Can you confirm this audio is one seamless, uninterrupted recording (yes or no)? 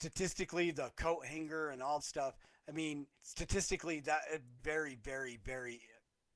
no